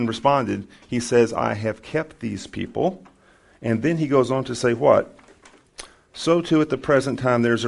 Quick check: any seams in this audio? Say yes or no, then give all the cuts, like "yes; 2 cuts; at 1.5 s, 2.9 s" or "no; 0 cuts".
no; 0 cuts